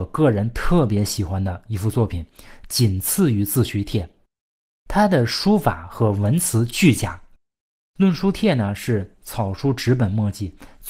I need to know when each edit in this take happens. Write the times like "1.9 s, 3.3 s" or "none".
none